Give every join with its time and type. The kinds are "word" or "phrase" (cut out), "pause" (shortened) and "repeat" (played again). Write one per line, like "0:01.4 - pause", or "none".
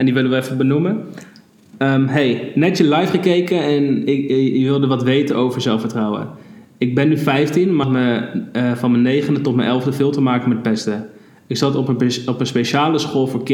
0:07.8 - word

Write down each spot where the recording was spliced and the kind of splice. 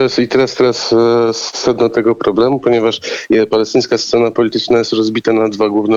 none

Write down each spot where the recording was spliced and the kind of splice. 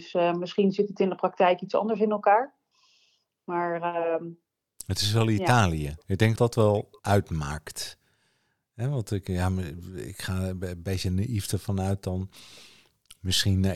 0:06.0 - pause
0:06.4 - word

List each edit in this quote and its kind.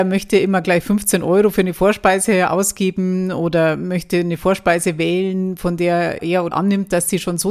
0:06.2 - word
0:06.5 - word

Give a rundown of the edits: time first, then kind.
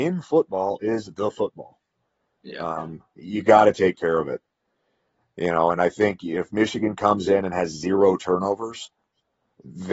none

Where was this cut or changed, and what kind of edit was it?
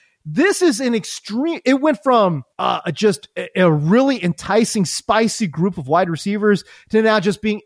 0:02.5 - pause

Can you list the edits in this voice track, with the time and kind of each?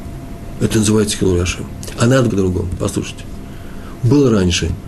0:02.3 - phrase

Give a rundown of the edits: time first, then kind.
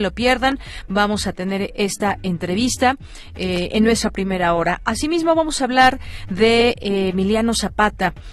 none

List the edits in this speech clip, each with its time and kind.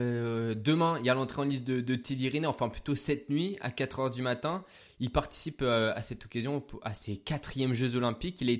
none

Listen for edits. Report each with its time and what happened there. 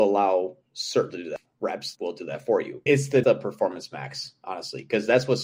0:01.1 - word
0:01.9 - word
0:03.2 - word

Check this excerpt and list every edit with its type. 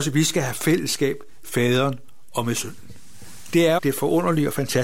0:01.4 - word
0:03.8 - word

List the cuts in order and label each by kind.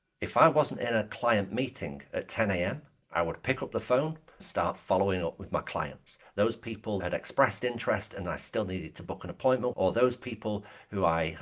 0:03.0 - word
0:04.4 - word
0:07.0 - word
0:09.7 - word

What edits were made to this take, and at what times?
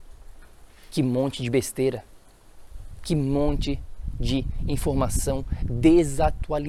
none

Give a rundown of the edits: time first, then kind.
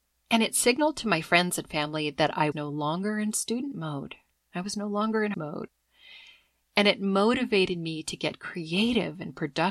0:02.5 - word
0:05.3 - word

